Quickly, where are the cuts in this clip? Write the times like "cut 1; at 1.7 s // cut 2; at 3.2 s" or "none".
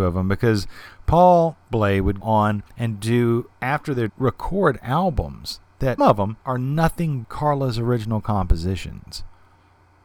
cut 1; at 2.2 s // cut 2; at 2.7 s // cut 3; at 3.5 s // cut 4; at 4.1 s // cut 5; at 6.0 s // cut 6; at 6.4 s // cut 7; at 7.2 s